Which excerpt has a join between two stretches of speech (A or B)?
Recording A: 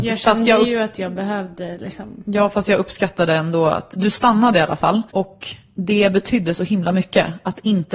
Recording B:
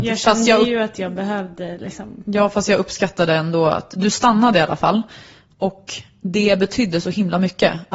A